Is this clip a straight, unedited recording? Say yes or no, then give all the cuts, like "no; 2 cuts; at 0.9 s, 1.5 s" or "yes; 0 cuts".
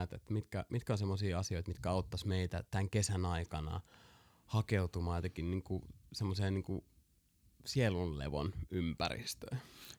yes; 0 cuts